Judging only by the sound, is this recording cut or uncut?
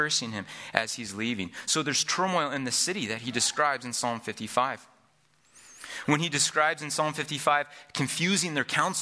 uncut